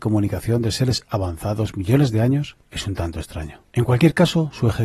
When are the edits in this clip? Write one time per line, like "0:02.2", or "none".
none